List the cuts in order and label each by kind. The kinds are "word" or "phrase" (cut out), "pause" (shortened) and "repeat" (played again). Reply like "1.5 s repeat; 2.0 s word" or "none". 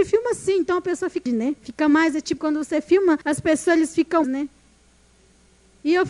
1.3 s phrase; 1.6 s pause; 2.4 s word; 3.2 s pause; 4.2 s phrase